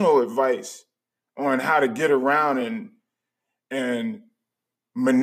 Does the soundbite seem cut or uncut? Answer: uncut